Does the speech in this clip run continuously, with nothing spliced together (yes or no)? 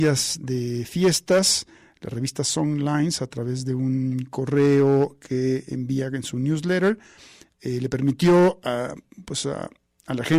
yes